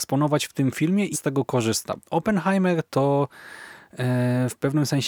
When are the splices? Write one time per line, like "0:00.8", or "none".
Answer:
0:01.1
0:02.0

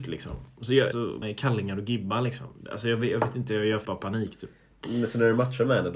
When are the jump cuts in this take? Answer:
0:00.9
0:01.2
0:03.8

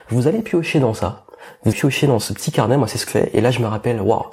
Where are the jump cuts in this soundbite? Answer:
0:01.7
0:03.1

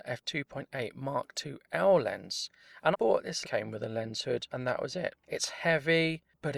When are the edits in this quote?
0:02.9
0:03.4
0:04.5

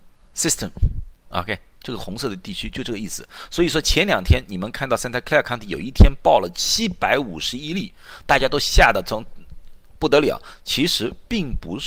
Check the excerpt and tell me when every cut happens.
0:01.2

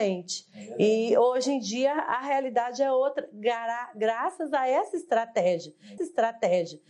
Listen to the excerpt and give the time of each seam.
0:06.0

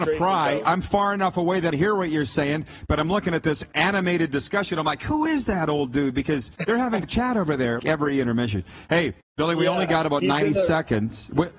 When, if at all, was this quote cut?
0:01.7
0:06.6
0:07.0
0:07.8
0:09.2

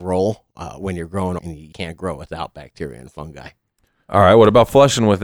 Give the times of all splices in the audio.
0:01.4
0:01.7

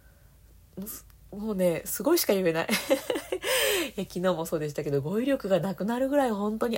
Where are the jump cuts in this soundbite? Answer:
none

